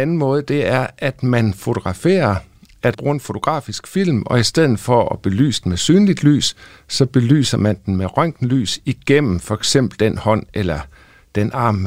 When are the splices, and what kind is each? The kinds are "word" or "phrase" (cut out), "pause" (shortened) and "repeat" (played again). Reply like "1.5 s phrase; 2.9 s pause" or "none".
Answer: 2.9 s word